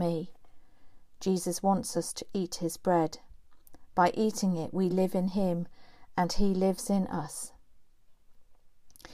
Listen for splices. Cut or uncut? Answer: uncut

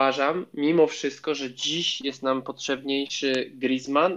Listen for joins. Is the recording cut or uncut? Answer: uncut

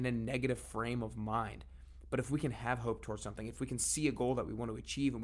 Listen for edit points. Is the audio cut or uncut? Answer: uncut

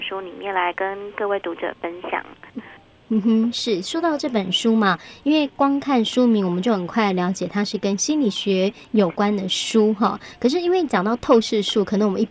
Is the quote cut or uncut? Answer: uncut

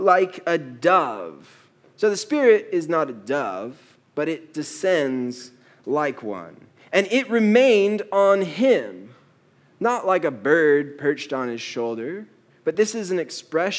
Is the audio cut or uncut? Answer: uncut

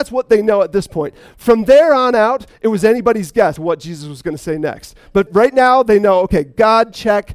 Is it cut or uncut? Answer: cut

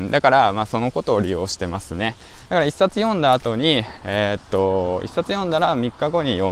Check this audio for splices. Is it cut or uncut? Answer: uncut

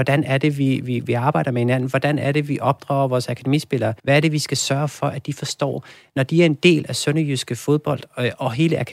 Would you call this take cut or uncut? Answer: cut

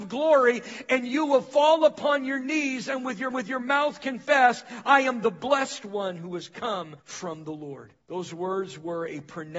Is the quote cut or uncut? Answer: cut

